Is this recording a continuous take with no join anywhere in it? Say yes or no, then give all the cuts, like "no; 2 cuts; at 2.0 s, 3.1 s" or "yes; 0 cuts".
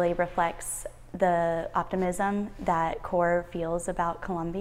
yes; 0 cuts